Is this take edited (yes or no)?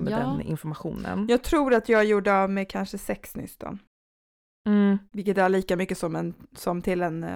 yes